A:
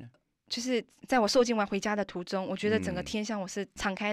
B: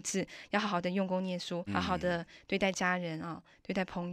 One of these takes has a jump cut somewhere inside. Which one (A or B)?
B